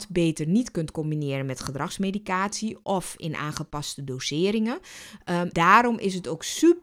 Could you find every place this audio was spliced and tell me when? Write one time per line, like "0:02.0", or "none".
0:05.5